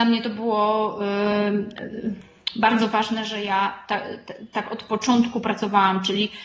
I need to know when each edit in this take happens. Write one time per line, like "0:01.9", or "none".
none

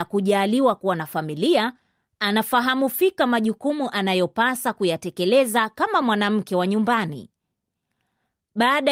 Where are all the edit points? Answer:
none

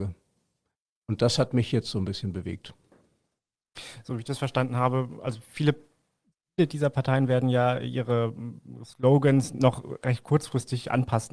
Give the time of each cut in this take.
none

